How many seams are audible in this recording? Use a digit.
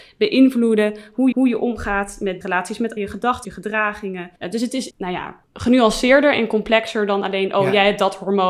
7